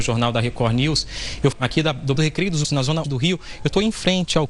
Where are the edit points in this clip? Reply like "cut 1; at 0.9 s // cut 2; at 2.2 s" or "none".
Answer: cut 1; at 1.5 s // cut 2; at 2.2 s // cut 3; at 2.6 s // cut 4; at 3.0 s